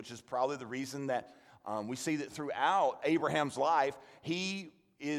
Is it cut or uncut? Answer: uncut